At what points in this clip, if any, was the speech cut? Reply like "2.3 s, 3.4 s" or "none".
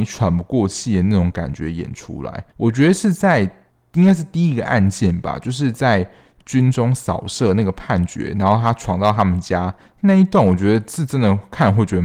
2.5 s, 3.7 s